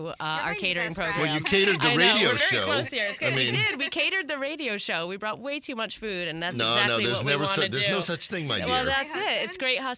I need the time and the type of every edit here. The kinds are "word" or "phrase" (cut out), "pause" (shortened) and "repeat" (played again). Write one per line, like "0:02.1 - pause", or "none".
none